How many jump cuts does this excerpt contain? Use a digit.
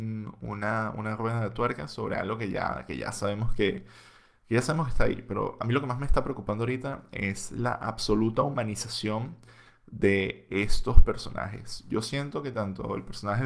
0